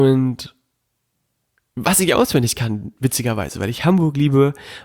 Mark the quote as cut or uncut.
uncut